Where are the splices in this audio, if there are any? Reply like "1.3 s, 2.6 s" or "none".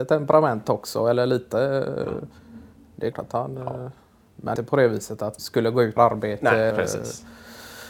3.1 s, 4.6 s, 5.4 s, 6.0 s, 6.7 s

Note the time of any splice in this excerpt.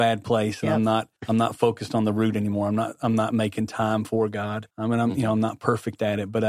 1.2 s, 4.7 s

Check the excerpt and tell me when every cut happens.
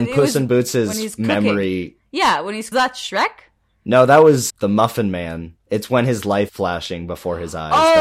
2.7 s, 4.5 s, 6.5 s

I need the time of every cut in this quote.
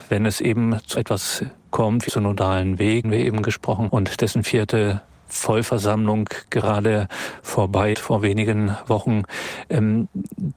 0.9 s, 2.1 s, 3.0 s, 3.9 s, 7.9 s

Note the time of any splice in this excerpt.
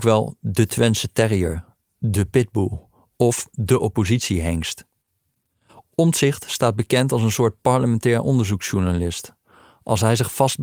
none

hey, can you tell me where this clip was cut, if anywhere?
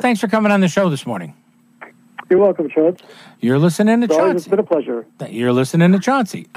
none

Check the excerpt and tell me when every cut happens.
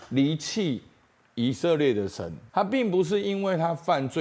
2.5 s

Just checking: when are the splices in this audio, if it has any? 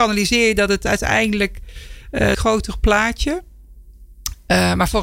2.3 s

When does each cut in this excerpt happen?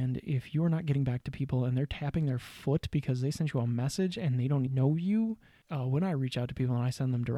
4.7 s

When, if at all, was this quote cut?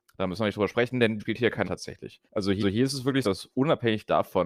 1.2 s, 1.6 s, 2.3 s, 2.6 s, 3.2 s

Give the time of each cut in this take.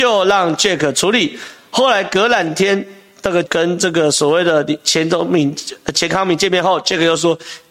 3.5 s

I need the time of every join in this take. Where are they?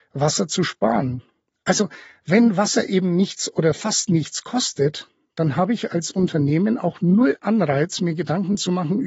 none

